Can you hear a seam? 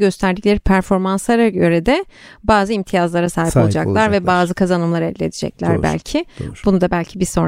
no; 0 cuts

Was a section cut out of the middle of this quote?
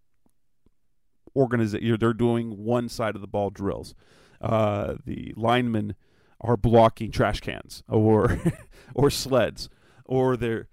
no; 0 cuts

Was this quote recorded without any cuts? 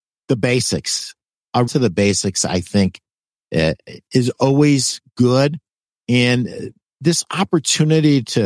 no; 1 cut; at 1.7 s

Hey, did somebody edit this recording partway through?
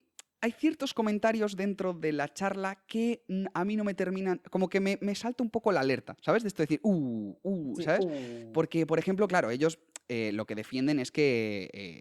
no; 0 cuts

